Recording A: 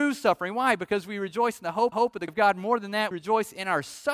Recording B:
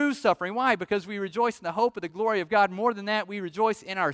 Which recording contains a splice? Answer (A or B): A